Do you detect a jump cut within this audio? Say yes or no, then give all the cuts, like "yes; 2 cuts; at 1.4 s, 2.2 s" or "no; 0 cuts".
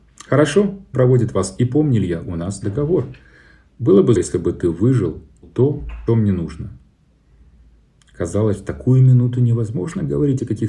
yes; 4 cuts; at 0.9 s, 4.2 s, 5.4 s, 6.1 s